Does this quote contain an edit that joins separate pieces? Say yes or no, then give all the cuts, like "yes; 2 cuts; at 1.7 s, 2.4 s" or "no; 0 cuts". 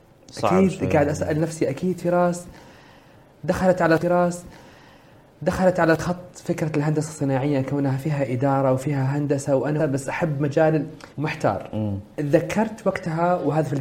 yes; 4 cuts; at 4.0 s, 9.8 s, 11.1 s, 12.1 s